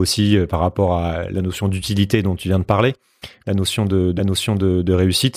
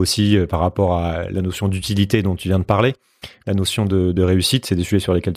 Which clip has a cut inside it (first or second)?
first